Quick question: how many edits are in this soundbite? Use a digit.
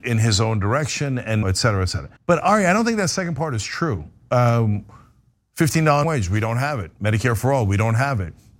3